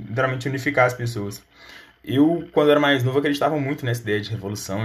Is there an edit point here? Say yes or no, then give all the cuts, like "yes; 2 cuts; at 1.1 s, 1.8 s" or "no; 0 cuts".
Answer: no; 0 cuts